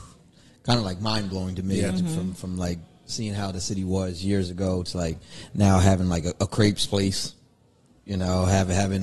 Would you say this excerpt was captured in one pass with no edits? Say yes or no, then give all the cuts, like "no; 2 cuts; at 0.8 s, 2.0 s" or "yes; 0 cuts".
yes; 0 cuts